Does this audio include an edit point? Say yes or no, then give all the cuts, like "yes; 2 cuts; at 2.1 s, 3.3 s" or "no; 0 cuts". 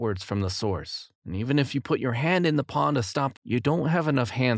yes; 2 cuts; at 1.2 s, 3.4 s